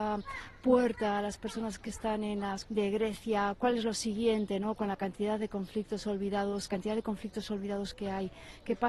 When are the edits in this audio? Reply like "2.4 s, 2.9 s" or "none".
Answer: 2.6 s, 6.7 s